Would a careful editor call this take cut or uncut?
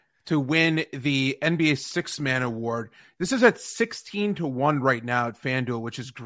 uncut